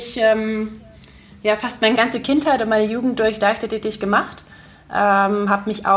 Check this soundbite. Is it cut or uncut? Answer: cut